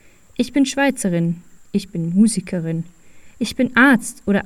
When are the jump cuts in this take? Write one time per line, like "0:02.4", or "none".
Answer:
0:01.6